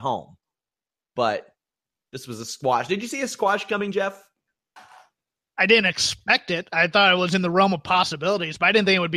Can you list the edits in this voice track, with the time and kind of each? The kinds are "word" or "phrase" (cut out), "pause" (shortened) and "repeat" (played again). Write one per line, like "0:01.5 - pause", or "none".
0:04.8 - pause